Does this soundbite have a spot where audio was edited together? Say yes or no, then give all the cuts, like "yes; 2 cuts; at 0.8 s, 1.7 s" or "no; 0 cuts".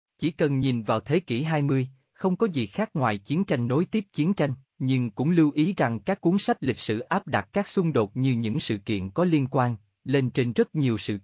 yes; 1 cut; at 4.7 s